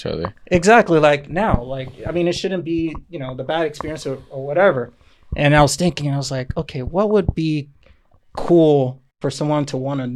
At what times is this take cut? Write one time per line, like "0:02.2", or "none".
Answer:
none